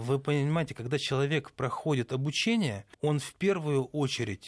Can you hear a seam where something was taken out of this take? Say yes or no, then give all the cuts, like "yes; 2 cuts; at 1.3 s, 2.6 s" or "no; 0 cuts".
yes; 1 cut; at 2.9 s